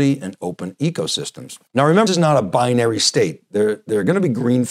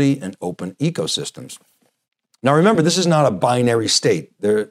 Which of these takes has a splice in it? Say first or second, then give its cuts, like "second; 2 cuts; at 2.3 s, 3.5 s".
first; 2 cuts; at 1.7 s, 2.1 s